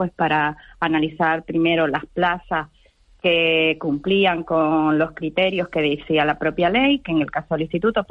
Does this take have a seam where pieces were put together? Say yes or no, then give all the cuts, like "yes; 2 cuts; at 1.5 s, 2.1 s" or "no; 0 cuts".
no; 0 cuts